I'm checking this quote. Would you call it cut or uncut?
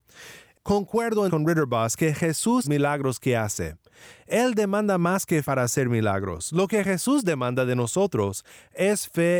cut